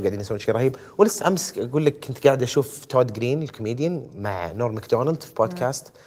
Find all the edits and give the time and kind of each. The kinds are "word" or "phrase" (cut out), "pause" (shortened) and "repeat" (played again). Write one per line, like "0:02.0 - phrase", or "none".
0:01.2 - phrase

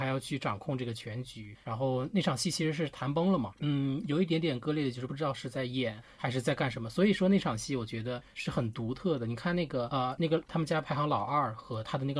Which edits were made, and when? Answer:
none

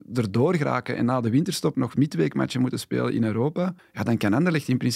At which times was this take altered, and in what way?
0:01.7 - word
0:03.8 - pause

